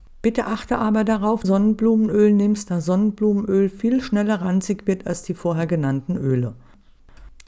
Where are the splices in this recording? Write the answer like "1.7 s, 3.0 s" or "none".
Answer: 1.4 s